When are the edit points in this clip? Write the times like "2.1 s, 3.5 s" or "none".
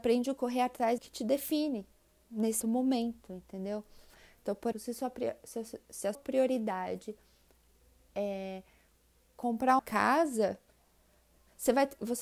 1.0 s, 2.6 s, 4.7 s, 6.1 s, 9.8 s